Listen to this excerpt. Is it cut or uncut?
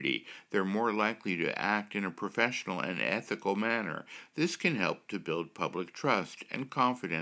uncut